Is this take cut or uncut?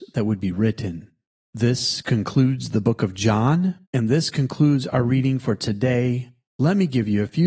cut